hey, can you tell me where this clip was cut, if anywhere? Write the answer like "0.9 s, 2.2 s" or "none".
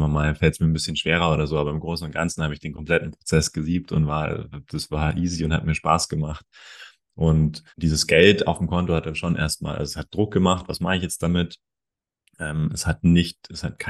7.7 s